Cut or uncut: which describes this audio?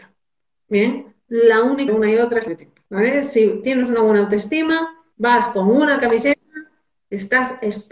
cut